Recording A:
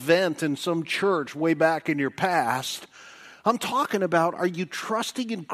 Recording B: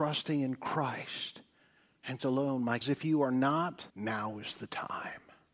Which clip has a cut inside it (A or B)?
B